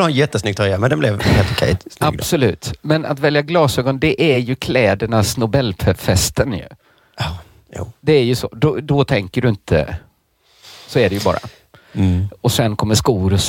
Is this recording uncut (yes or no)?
yes